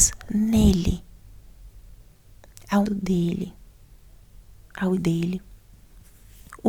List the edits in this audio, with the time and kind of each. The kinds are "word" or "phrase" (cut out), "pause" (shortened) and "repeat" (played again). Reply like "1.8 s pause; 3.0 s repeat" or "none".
2.9 s word; 5.0 s word